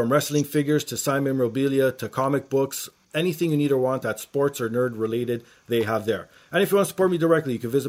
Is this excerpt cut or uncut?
uncut